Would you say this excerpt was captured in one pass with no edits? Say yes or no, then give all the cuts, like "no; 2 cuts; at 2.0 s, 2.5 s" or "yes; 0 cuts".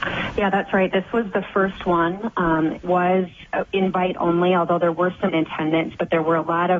no; 2 cuts; at 2.8 s, 5.3 s